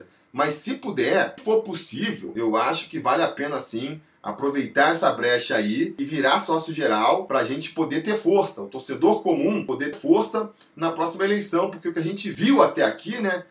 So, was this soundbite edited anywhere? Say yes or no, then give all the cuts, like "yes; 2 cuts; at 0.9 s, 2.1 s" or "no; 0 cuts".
yes; 2 cuts; at 1.4 s, 9.9 s